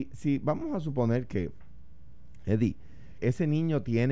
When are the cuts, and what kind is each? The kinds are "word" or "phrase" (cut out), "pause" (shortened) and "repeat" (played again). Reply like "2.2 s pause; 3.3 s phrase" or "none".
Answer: 3.2 s word